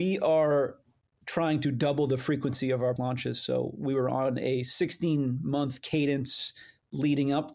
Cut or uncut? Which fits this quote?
cut